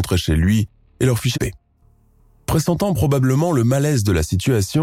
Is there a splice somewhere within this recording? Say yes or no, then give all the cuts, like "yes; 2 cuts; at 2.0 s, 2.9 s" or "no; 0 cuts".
yes; 1 cut; at 1.3 s